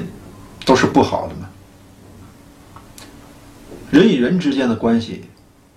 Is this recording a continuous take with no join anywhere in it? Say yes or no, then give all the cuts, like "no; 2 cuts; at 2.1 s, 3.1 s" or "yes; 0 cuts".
yes; 0 cuts